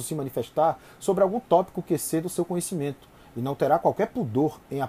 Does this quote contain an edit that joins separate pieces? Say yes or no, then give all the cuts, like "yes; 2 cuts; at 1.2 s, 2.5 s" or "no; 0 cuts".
no; 0 cuts